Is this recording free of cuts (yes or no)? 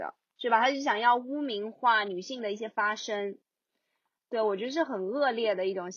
yes